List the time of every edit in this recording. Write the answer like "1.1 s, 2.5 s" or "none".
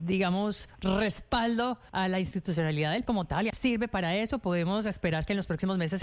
1.9 s, 3.1 s, 3.5 s